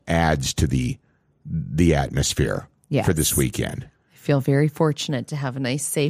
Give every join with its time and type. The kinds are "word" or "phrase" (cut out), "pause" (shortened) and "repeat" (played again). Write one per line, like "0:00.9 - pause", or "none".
none